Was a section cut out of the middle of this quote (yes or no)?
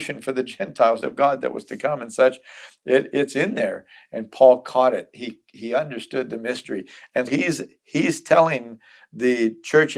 yes